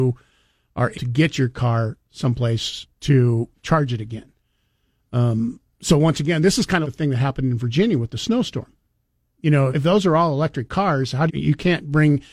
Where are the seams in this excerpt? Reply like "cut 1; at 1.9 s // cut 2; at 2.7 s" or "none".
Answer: cut 1; at 0.9 s // cut 2; at 2.9 s // cut 3; at 5.6 s // cut 4; at 6.8 s // cut 5; at 9.7 s // cut 6; at 11.3 s